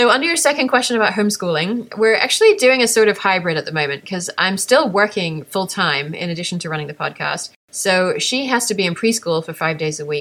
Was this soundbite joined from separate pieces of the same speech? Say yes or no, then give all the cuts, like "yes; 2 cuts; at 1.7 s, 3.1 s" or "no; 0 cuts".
no; 0 cuts